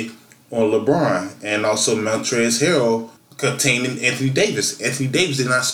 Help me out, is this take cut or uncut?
cut